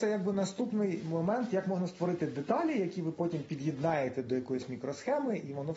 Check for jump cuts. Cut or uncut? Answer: uncut